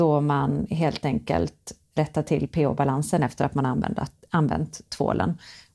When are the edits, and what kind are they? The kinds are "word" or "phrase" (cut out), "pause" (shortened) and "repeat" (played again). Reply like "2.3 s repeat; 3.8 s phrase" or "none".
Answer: none